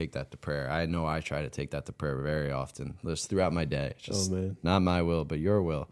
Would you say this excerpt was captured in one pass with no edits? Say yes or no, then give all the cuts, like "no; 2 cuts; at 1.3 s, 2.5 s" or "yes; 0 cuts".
yes; 0 cuts